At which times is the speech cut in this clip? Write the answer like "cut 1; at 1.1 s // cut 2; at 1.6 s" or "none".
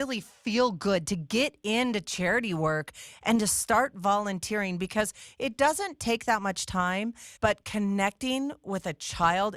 cut 1; at 7.4 s

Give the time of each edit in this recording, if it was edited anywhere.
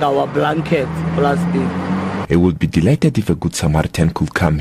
none

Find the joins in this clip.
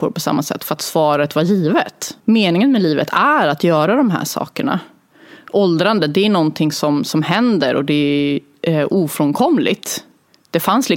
cut 1; at 2.2 s

